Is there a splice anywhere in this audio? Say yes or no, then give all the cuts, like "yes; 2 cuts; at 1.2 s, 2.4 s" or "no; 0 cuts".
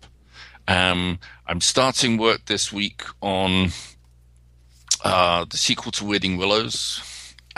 no; 0 cuts